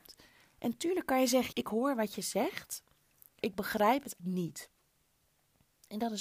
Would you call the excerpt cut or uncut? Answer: cut